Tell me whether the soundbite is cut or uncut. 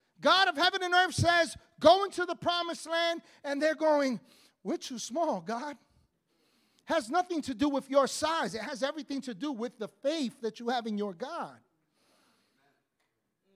uncut